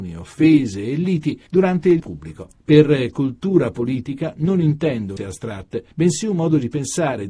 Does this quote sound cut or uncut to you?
cut